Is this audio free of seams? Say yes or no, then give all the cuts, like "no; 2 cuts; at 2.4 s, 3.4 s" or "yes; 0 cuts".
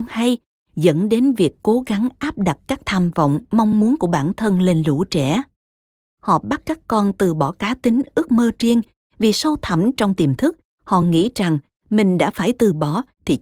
yes; 0 cuts